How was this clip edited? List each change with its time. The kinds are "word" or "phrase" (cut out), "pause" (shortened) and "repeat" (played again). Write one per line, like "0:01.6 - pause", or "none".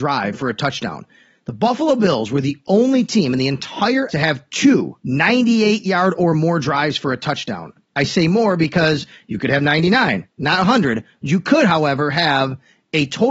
0:04.1 - phrase
0:05.0 - pause